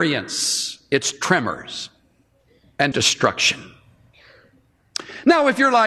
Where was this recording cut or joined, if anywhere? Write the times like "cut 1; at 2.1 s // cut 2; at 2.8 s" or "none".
cut 1; at 2.9 s